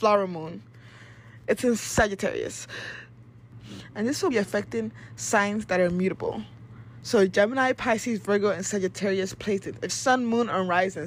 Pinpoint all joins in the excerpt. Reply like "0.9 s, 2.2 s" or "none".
4.3 s, 9.9 s